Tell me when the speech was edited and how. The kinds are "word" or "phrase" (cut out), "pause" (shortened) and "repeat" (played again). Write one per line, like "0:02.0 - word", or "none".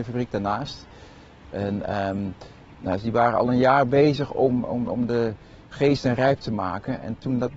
none